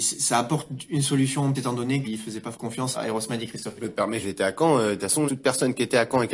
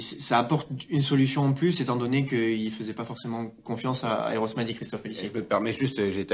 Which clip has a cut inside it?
first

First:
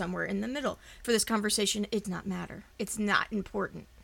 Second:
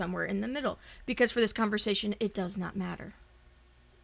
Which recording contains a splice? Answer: first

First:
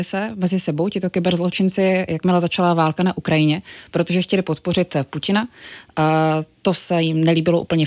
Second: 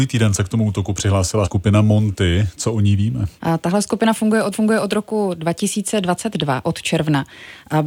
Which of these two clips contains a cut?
second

